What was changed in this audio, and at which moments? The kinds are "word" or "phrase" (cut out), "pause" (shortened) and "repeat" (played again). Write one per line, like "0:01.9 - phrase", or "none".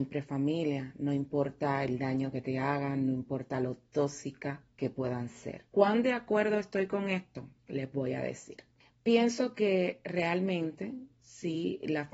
0:04.7 - pause
0:05.7 - pause
0:07.6 - pause
0:08.8 - pause